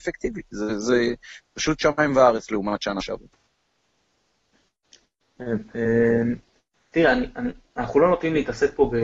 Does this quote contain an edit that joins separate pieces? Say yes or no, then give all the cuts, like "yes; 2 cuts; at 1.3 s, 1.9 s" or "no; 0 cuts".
no; 0 cuts